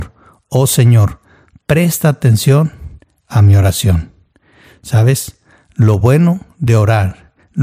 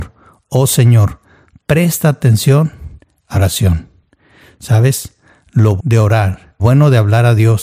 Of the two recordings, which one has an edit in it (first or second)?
second